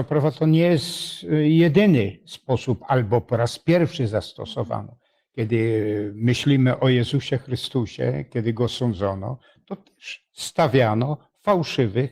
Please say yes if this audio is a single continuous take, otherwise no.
yes